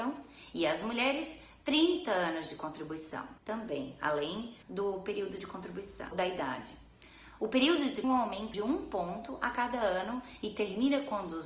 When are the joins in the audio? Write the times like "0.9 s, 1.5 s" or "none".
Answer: 3.4 s, 4.6 s, 6.1 s, 8.0 s, 8.5 s